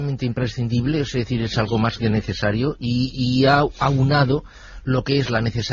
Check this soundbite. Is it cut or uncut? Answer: uncut